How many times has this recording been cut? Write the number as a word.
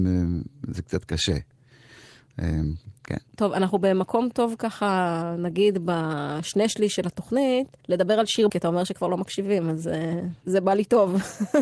four